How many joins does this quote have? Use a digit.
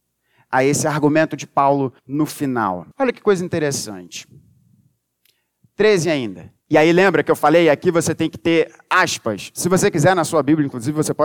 3